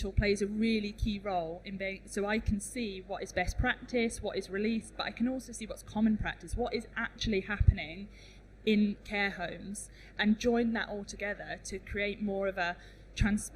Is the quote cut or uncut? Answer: cut